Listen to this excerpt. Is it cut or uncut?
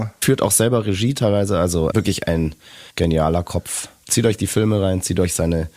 cut